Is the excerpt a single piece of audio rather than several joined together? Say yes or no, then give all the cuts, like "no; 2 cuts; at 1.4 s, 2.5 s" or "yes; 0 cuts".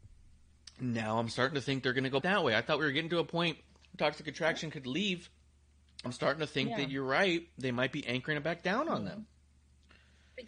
no; 2 cuts; at 2.2 s, 6.1 s